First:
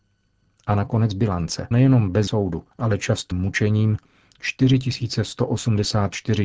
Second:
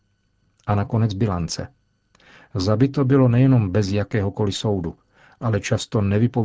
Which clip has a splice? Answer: first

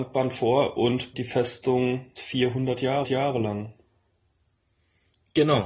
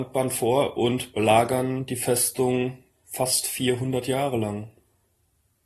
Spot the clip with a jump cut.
first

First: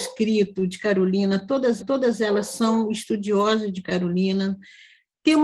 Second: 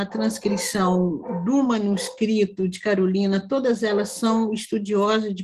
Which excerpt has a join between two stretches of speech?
first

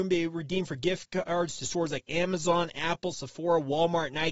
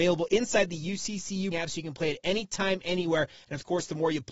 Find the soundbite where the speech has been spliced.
second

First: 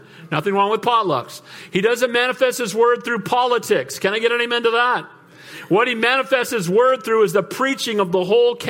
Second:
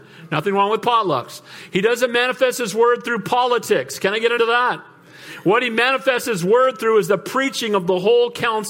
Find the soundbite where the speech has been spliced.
second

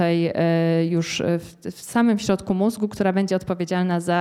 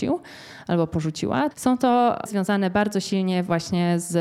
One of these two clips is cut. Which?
second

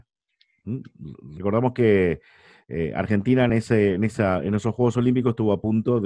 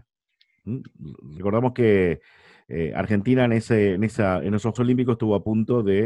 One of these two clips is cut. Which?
second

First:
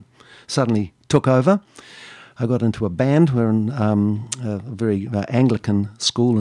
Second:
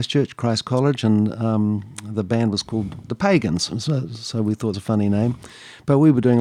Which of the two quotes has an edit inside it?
second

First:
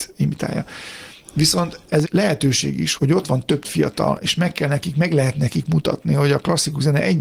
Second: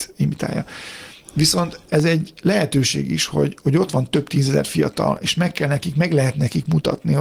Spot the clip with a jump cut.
first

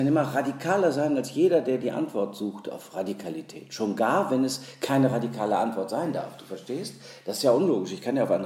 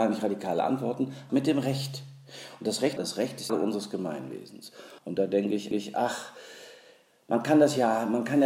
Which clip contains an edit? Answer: second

